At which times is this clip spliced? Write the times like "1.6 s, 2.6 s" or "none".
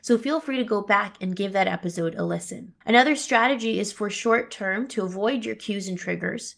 2.8 s